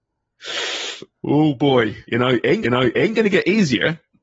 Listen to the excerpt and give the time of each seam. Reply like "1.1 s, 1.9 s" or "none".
2.0 s, 2.6 s